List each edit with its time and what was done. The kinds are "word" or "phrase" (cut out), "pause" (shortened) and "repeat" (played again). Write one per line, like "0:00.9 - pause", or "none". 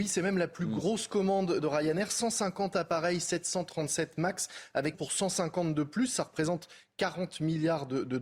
0:01.6 - phrase
0:04.9 - phrase